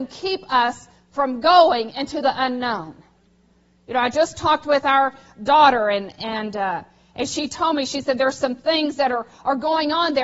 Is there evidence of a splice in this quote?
no; 0 cuts

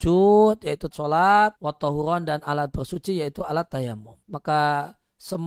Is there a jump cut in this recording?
yes; 3 cuts; at 0.9 s, 1.6 s, 4.2 s

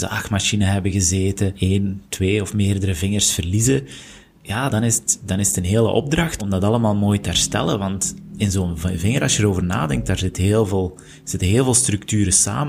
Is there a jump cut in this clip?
yes; 3 cuts; at 1.5 s, 4.7 s, 6.4 s

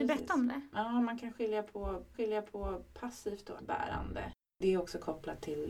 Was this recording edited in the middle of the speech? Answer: yes; 2 cuts; at 2.1 s, 3.6 s

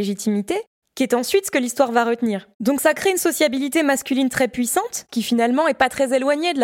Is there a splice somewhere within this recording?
yes; 1 cut; at 2.5 s

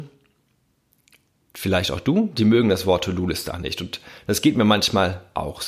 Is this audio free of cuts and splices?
no; 1 cut; at 3.5 s

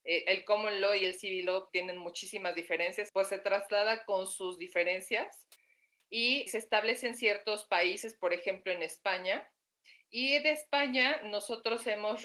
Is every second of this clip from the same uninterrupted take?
no; 3 cuts; at 1.7 s, 3.1 s, 6.5 s

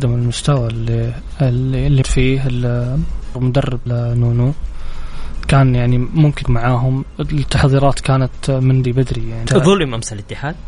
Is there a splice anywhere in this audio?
yes; 6 cuts; at 2.0 s, 3.3 s, 3.9 s, 6.4 s, 8.8 s, 9.5 s

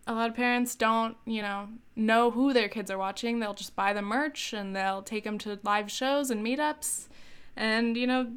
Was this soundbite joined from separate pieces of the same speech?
no; 0 cuts

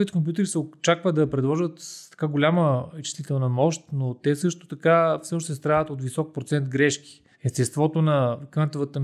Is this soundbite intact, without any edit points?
no; 1 cut; at 7.3 s

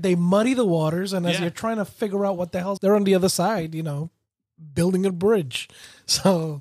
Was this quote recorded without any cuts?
no; 1 cut; at 2.8 s

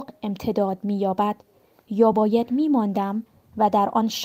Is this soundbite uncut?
yes; 0 cuts

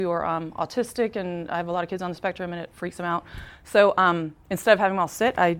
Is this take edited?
no; 0 cuts

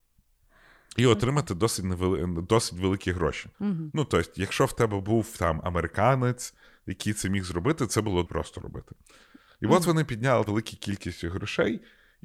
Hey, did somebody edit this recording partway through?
yes; 3 cuts; at 3.5 s, 8.3 s, 10.5 s

